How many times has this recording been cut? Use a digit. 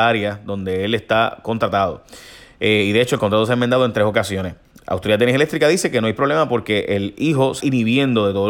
1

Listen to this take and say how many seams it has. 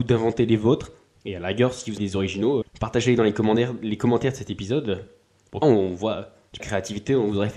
4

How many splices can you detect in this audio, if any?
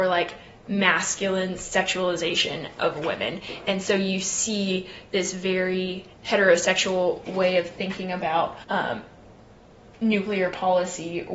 2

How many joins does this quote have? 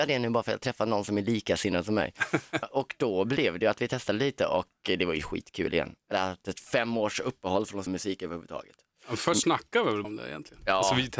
4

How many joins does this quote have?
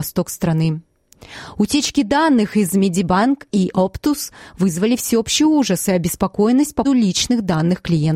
1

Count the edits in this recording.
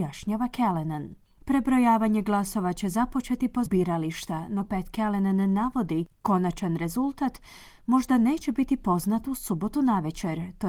2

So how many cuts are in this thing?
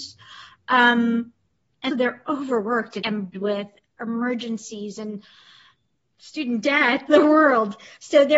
5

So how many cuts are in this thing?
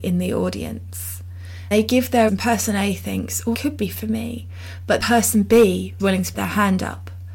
6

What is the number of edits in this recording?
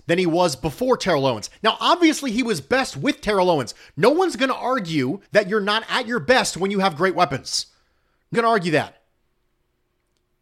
2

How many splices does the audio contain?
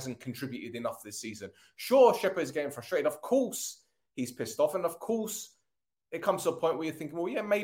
0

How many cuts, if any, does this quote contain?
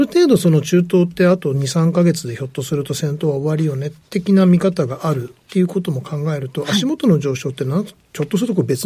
0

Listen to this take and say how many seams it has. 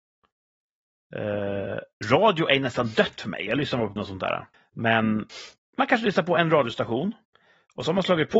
3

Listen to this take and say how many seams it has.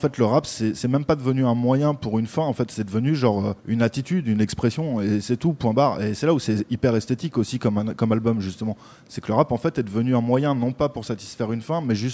1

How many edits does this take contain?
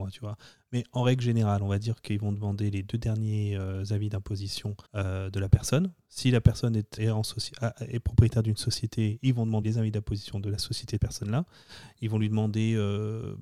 4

